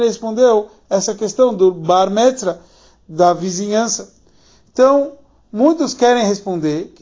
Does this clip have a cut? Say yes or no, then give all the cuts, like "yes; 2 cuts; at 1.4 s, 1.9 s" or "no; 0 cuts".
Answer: no; 0 cuts